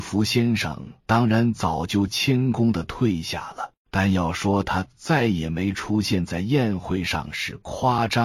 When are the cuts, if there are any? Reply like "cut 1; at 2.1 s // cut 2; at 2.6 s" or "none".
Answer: cut 1; at 1.0 s // cut 2; at 3.8 s